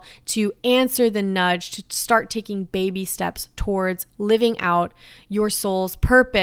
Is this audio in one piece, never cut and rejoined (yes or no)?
yes